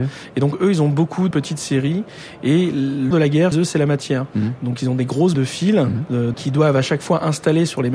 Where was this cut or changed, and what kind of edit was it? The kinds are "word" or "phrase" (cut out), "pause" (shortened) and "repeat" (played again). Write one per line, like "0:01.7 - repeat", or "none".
0:01.3 - word
0:03.1 - word
0:03.5 - word
0:05.3 - word
0:06.3 - word